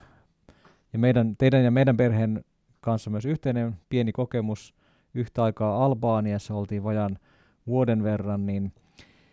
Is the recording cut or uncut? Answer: uncut